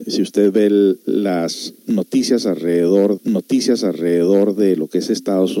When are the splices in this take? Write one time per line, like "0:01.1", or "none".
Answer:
0:03.2